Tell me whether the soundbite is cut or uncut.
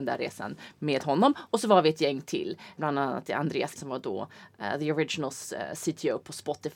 cut